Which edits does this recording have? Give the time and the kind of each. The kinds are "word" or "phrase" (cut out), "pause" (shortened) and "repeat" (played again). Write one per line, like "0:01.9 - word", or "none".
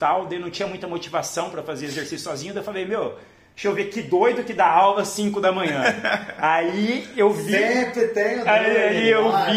none